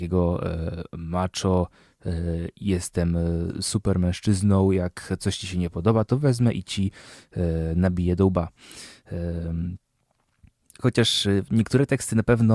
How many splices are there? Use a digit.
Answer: 0